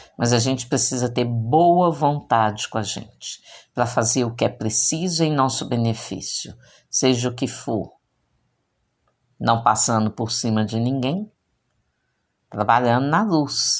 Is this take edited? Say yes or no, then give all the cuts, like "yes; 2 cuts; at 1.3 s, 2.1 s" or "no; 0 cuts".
no; 0 cuts